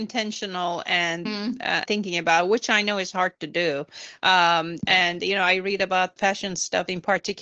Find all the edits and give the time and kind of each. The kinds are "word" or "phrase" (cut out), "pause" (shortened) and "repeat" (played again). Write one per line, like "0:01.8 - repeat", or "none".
0:01.2 - word
0:01.8 - word
0:06.2 - word